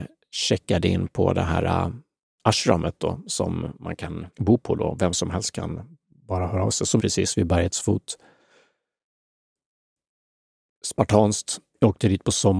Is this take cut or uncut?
cut